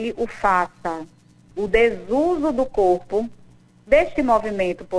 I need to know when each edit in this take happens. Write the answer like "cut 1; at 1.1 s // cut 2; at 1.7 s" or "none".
none